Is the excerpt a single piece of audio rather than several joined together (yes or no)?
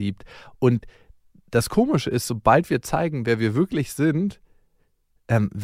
yes